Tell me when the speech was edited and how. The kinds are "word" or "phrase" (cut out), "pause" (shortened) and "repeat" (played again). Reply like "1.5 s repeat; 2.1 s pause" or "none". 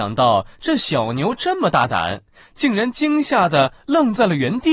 none